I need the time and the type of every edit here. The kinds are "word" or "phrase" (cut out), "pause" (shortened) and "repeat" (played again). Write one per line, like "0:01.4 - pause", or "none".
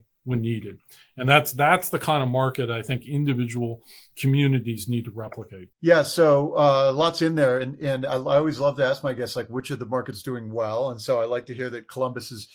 0:05.7 - pause